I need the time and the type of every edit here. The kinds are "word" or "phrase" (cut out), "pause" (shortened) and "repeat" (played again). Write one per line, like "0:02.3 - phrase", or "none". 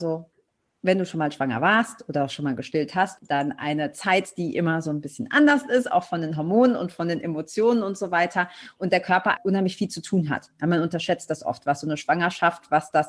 0:03.2 - phrase
0:09.4 - word